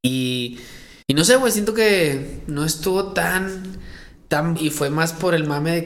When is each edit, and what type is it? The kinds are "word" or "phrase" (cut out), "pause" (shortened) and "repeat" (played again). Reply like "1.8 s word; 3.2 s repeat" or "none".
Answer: 1.0 s pause; 4.5 s word